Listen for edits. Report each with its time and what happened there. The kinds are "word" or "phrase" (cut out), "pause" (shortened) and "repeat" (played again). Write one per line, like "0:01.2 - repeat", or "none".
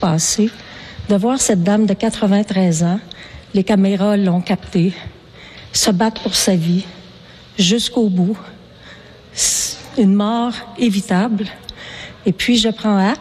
none